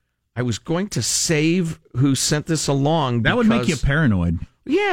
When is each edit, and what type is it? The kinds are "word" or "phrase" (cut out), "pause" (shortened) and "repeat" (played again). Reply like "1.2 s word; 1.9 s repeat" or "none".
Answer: none